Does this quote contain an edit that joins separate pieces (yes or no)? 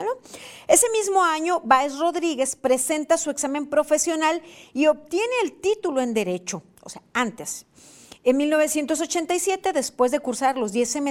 no